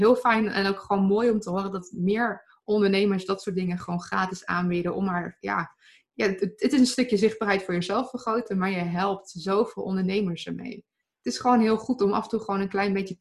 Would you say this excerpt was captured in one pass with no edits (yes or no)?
yes